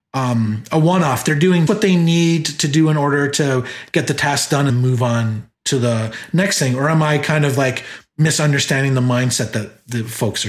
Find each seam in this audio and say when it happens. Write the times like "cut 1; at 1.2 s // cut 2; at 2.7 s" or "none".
cut 1; at 1.7 s // cut 2; at 4.7 s // cut 3; at 5.5 s

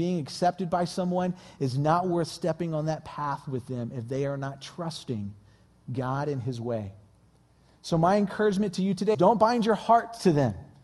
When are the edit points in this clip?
cut 1; at 9.1 s

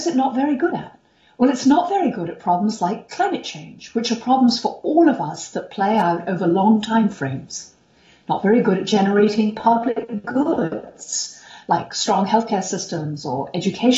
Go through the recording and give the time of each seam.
none

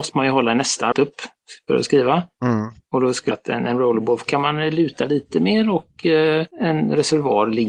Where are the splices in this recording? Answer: cut 1; at 0.9 s // cut 2; at 3.3 s // cut 3; at 6.5 s

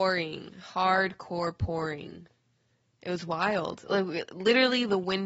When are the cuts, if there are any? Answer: none

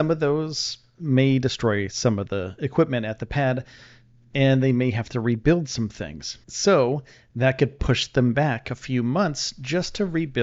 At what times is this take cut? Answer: cut 1; at 6.4 s

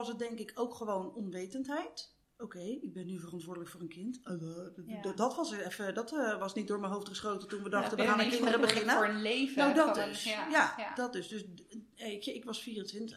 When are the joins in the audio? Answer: cut 1; at 2.2 s

